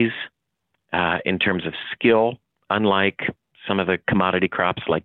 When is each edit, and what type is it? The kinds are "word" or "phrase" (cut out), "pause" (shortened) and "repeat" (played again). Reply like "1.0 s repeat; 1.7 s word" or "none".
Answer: none